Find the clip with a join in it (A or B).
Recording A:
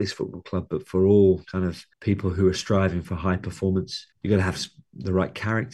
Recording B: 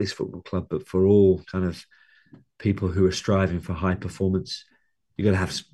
A